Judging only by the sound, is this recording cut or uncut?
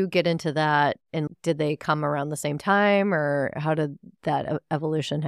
uncut